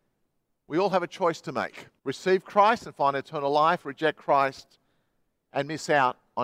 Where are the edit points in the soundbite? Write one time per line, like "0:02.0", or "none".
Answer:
0:02.0

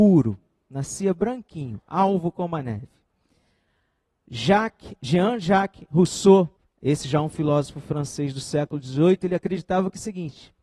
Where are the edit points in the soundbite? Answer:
0:06.6

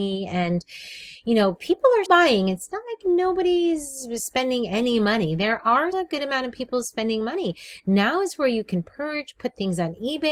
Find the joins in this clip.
0:02.1
0:05.9

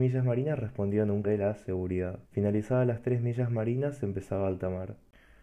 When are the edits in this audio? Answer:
0:01.2
0:02.2

